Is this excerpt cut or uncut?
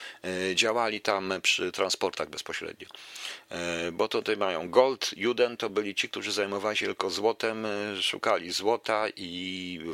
uncut